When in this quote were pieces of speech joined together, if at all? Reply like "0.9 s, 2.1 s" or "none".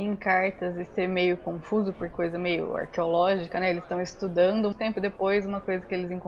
2.1 s, 4.7 s